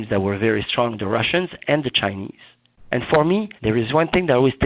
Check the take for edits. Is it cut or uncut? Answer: cut